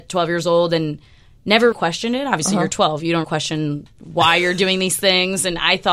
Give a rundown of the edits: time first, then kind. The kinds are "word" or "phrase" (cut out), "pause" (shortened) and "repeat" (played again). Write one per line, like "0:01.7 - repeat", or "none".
0:01.7 - word
0:03.2 - word